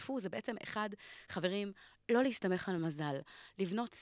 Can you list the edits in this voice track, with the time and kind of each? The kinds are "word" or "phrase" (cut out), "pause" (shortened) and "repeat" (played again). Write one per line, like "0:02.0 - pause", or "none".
none